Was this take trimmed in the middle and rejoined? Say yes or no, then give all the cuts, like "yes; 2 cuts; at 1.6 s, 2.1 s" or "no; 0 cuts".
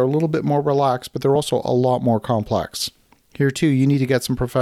no; 0 cuts